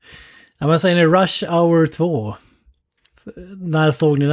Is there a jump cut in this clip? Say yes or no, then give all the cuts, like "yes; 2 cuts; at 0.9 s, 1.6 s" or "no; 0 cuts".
no; 0 cuts